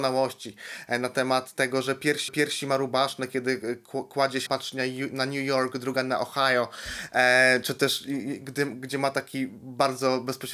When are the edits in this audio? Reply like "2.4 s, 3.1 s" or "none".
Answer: 2.3 s, 4.5 s